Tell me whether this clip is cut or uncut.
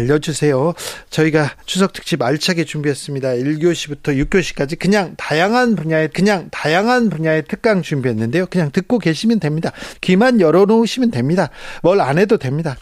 cut